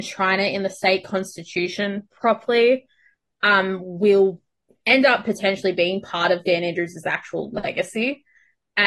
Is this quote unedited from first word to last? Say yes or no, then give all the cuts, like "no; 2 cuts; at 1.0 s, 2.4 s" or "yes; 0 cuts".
yes; 0 cuts